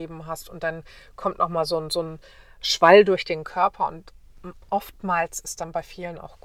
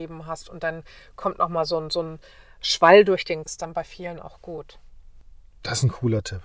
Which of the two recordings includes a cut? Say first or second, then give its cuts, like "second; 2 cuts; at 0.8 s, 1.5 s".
second; 1 cut; at 3.4 s